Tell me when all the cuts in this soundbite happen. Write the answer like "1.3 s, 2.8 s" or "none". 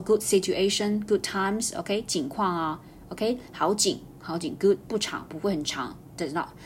4.8 s